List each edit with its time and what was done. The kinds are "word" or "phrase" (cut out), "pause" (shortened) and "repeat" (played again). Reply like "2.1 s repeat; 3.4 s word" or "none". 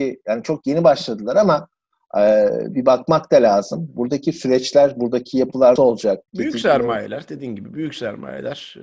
5.8 s word; 6.3 s pause